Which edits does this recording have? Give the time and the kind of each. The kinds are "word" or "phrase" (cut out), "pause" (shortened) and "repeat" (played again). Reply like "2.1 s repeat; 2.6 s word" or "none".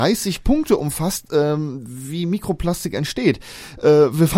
none